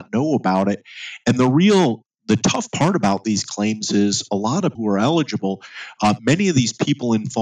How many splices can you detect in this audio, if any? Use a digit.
1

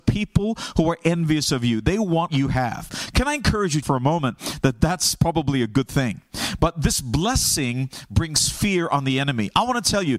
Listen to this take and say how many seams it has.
2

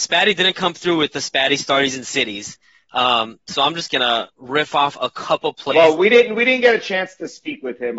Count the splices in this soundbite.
2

